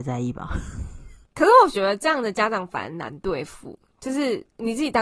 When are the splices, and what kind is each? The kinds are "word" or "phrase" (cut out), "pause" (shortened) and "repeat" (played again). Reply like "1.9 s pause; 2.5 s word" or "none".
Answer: 1.2 s pause